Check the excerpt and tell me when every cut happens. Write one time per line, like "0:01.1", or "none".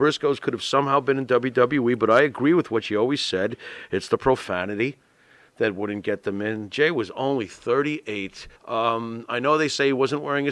0:08.5